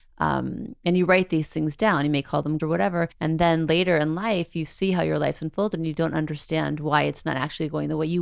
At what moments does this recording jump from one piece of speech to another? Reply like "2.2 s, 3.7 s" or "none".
2.6 s, 3.1 s

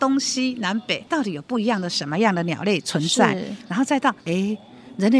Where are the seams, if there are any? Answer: 1.1 s, 4.2 s

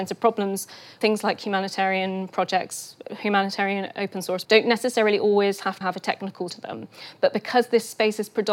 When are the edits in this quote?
1.0 s, 3.0 s, 4.4 s, 5.8 s, 6.5 s

